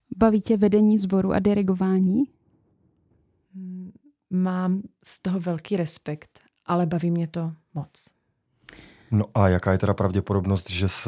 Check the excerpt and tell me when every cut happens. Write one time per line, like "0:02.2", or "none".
none

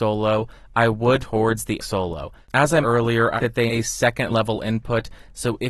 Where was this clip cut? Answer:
0:01.2
0:01.8
0:02.8
0:03.4
0:03.7
0:04.3

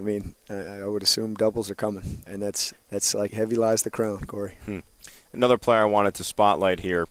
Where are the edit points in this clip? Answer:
0:02.3
0:02.7
0:03.3

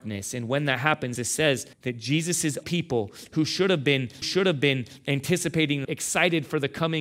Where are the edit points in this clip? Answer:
0:01.2
0:01.7
0:02.6
0:04.2
0:05.8

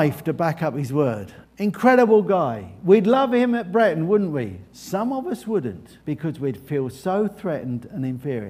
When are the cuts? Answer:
0:01.4
0:04.7
0:06.0

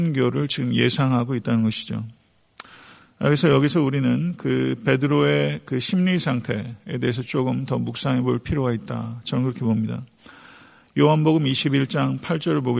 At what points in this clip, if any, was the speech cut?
none

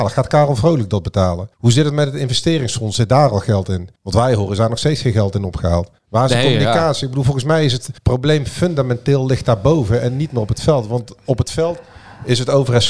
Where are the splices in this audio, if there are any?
0:01.5
0:04.0
0:06.0
0:08.0

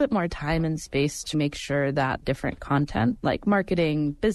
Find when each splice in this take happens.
0:01.3
0:02.2

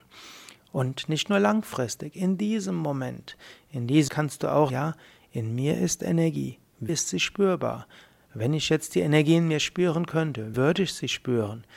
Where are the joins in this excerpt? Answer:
0:04.1
0:04.7
0:06.9
0:10.5

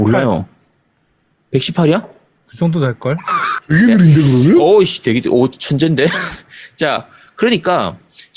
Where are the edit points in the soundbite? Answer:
none

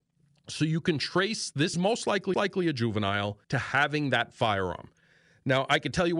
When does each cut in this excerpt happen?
0:01.7
0:02.3
0:03.4

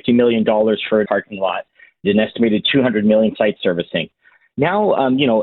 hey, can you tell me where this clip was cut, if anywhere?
0:01.0
0:02.0
0:03.3

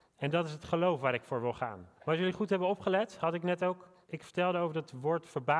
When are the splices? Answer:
0:02.0
0:04.0

